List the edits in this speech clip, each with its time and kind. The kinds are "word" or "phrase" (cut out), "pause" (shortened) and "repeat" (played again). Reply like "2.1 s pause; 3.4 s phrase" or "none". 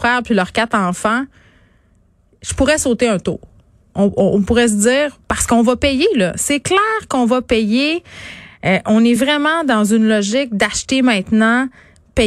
none